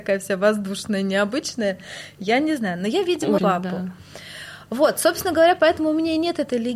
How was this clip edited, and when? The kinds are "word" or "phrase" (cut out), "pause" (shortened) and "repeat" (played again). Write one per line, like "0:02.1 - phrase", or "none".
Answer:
0:03.4 - word

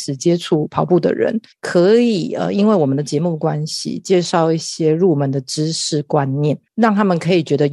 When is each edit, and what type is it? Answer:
0:01.5 - pause
0:06.7 - pause

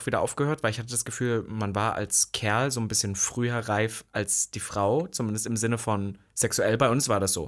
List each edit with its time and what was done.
none

